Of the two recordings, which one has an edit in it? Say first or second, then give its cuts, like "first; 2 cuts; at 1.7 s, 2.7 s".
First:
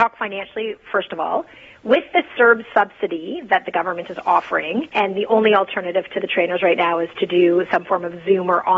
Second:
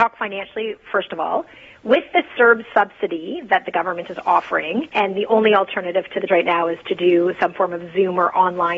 second; 1 cut; at 6.3 s